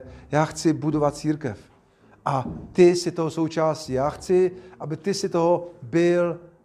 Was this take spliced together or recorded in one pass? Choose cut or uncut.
uncut